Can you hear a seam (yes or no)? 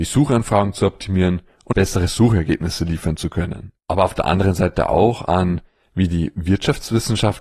yes